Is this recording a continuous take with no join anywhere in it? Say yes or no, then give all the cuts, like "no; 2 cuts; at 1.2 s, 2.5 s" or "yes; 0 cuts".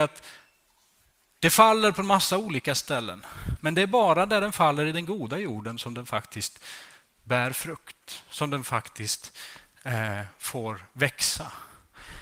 yes; 0 cuts